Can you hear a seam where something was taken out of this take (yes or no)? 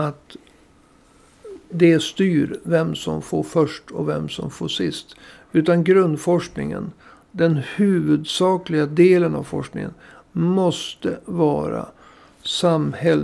yes